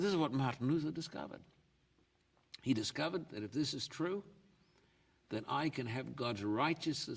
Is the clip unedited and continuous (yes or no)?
yes